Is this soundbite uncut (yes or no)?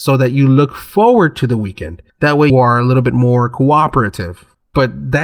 no